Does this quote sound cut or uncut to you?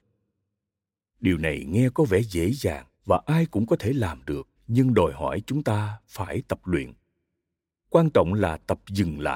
cut